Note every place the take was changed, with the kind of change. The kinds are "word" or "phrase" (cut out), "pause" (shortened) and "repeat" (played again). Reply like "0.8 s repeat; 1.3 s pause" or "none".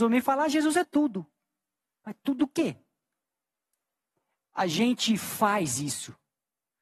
none

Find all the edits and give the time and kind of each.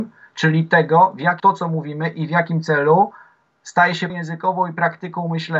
1.4 s word; 4.1 s word

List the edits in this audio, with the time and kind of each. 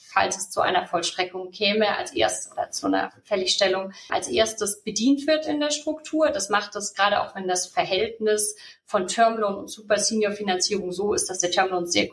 4.1 s word

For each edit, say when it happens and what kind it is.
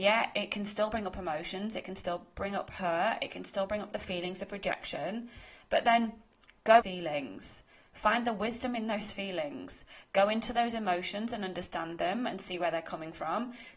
6.8 s phrase

